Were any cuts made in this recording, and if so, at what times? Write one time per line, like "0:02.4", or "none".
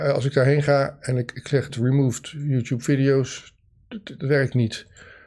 0:01.7
0:04.2